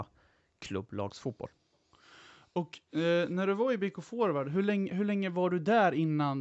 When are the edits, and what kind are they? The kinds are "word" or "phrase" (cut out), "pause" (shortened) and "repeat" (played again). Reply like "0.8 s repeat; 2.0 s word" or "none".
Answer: none